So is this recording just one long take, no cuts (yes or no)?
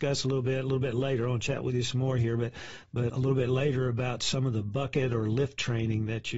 no